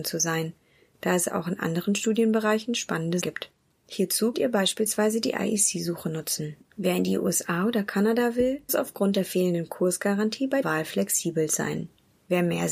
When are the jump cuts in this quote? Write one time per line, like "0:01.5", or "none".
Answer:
0:03.2
0:04.3
0:08.7
0:10.6